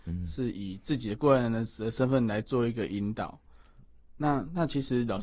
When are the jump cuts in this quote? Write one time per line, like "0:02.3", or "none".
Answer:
none